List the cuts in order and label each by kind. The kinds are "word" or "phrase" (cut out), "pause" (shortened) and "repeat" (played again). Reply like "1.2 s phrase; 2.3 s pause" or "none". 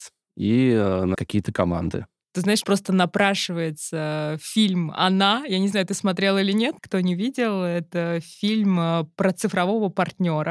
1.1 s phrase; 2.6 s phrase; 6.8 s word